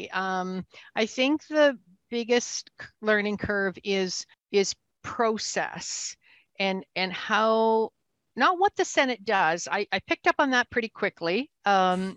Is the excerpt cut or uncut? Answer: cut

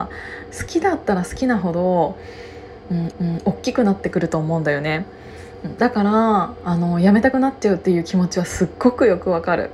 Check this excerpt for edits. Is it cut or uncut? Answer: cut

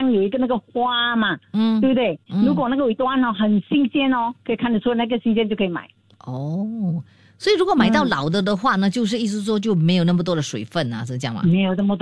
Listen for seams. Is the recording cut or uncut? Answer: uncut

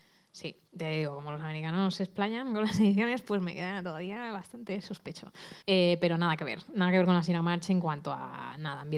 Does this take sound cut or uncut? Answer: cut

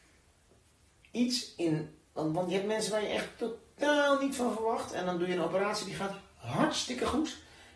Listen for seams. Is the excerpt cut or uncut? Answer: uncut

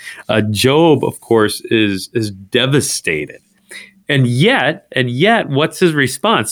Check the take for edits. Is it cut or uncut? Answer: uncut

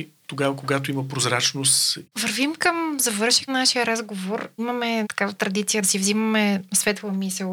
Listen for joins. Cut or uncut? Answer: cut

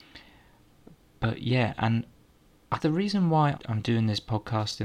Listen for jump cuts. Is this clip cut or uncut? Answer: cut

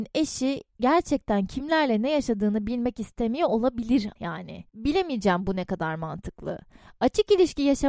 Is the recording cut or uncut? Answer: cut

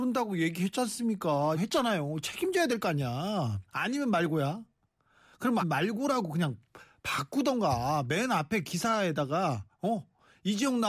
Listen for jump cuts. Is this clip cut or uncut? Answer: cut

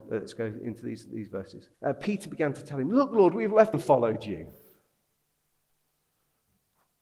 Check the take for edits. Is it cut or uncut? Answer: cut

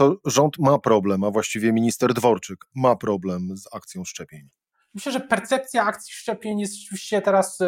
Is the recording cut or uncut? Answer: uncut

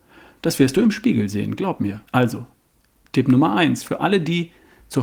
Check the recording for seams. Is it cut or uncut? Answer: cut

